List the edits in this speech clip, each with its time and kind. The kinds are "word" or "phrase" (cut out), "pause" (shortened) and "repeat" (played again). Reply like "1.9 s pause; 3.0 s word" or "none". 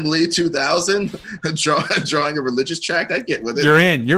none